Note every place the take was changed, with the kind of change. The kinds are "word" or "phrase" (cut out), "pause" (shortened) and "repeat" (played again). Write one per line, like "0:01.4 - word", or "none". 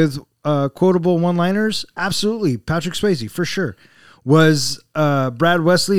none